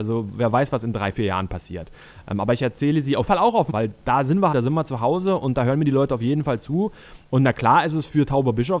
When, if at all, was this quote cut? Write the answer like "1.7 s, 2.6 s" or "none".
3.3 s, 3.7 s, 4.5 s